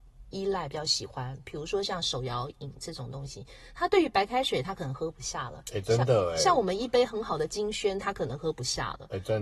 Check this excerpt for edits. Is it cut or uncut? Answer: uncut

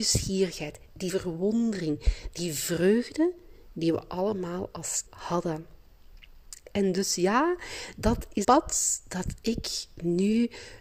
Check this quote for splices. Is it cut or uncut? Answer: cut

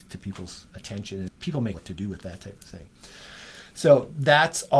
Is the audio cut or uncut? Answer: cut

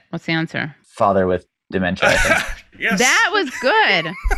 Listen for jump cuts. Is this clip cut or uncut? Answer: uncut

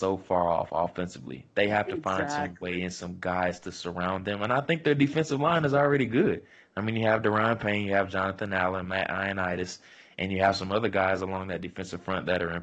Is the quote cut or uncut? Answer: uncut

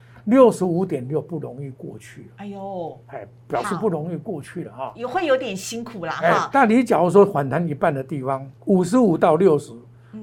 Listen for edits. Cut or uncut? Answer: cut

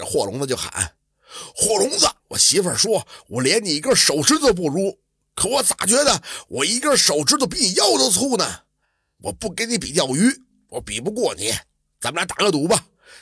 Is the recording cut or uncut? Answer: cut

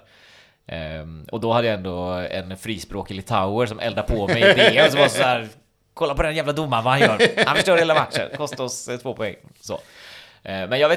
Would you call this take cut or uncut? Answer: uncut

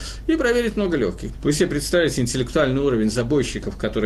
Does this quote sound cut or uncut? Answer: cut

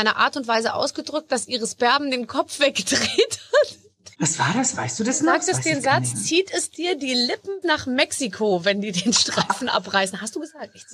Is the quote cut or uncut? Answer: cut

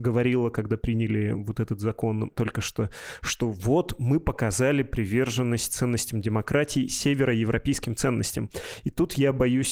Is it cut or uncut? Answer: uncut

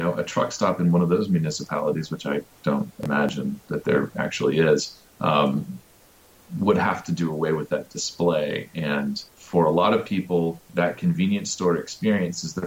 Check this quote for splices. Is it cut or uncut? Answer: cut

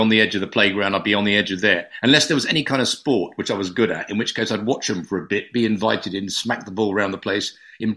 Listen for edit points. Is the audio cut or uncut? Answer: uncut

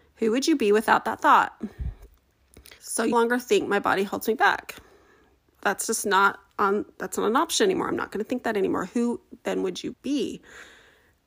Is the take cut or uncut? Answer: cut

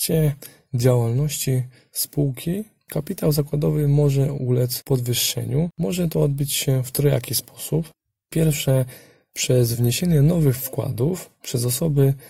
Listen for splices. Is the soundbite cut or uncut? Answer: uncut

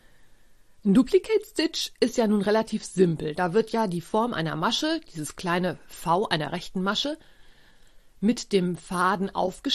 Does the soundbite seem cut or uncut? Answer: uncut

